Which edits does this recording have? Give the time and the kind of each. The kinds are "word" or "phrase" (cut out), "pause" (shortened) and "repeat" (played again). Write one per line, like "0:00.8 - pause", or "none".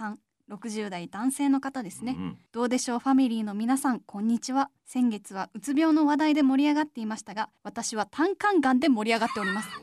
0:02.5 - pause
0:04.8 - pause
0:07.6 - pause